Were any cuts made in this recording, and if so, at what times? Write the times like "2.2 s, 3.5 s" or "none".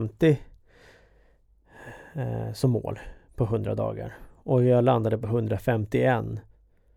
none